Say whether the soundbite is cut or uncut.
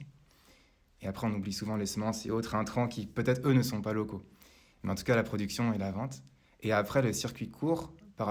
uncut